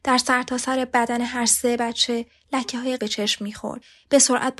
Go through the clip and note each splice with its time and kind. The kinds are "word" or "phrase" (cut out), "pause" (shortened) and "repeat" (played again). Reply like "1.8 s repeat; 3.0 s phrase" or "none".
3.0 s word

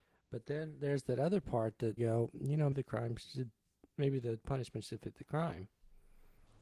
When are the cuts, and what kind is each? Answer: 2.0 s phrase; 2.7 s word

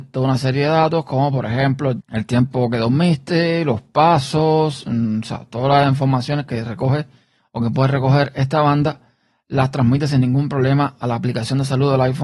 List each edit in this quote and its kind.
none

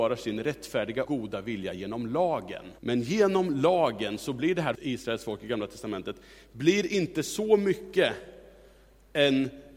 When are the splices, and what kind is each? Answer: 1.0 s word; 2.8 s pause; 4.7 s word

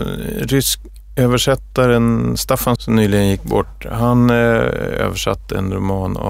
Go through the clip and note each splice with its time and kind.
2.7 s word

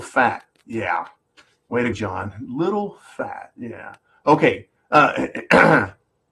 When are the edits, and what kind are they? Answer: 1.9 s word

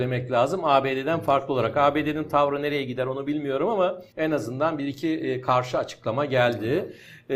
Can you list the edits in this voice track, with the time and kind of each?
4.1 s pause

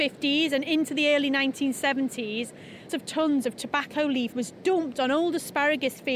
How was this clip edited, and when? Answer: 2.9 s word; 4.3 s word

